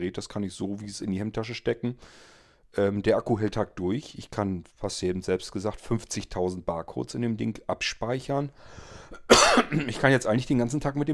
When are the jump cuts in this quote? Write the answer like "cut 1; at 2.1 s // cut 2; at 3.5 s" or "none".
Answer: cut 1; at 1.0 s // cut 2; at 3.5 s // cut 3; at 4.7 s